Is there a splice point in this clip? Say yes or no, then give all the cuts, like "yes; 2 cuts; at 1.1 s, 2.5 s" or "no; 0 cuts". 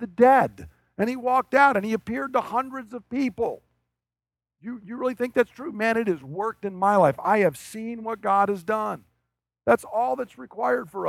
no; 0 cuts